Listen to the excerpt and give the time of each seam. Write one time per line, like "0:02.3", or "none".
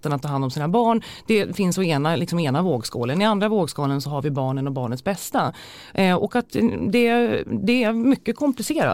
none